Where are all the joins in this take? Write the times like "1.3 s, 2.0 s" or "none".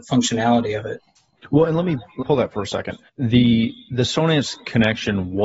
2.2 s, 3.1 s

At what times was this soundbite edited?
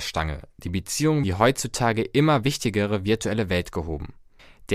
1.2 s

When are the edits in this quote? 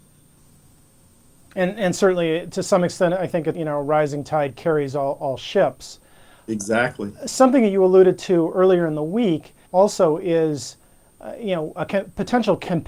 3.5 s, 9.7 s

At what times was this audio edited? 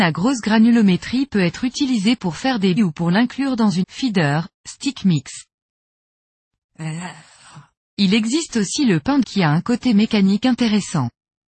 2.8 s, 3.8 s, 9.2 s

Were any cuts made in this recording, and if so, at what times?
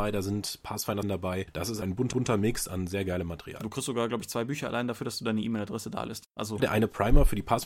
1.0 s, 1.8 s, 2.1 s, 6.6 s

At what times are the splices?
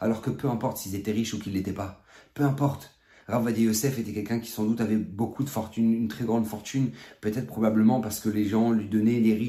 none

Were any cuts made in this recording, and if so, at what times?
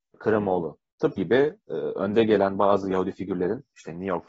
1.2 s

